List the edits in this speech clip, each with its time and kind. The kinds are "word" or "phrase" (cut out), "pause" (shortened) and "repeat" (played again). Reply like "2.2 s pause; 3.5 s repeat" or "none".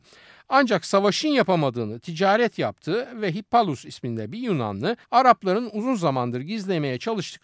5.0 s pause